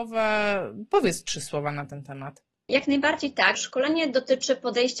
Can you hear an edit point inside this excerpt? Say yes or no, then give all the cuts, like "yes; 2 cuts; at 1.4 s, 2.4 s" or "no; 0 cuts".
yes; 1 cut; at 3.5 s